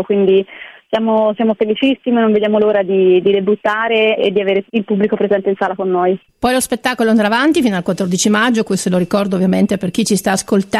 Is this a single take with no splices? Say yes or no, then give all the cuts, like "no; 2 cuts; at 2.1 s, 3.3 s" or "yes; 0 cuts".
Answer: no; 3 cuts; at 4.2 s, 4.7 s, 6.3 s